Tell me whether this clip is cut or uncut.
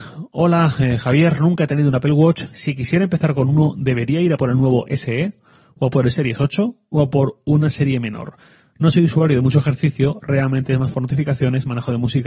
uncut